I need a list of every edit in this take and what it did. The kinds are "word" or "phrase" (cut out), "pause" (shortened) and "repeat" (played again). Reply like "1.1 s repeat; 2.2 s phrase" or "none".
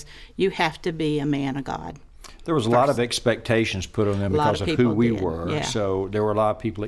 none

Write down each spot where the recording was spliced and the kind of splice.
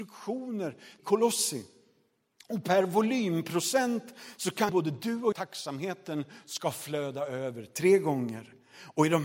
1.0 s phrase; 4.7 s word; 5.3 s phrase

